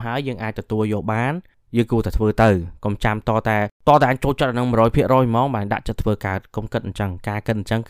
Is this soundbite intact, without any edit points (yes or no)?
no